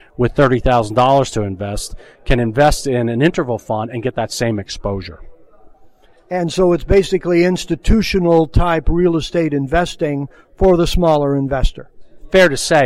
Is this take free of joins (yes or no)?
yes